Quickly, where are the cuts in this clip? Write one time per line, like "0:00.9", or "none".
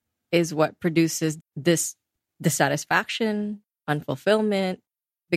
0:01.4